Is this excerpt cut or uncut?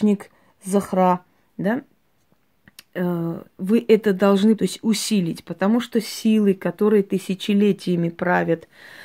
cut